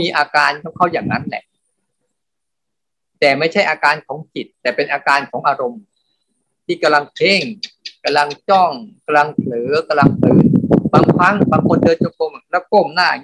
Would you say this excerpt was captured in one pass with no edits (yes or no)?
no